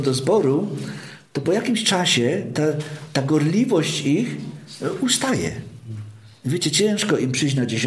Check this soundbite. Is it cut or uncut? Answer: uncut